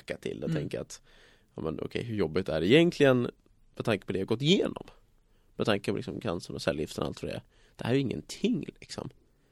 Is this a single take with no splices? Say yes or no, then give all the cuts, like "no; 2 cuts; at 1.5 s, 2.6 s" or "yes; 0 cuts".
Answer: yes; 0 cuts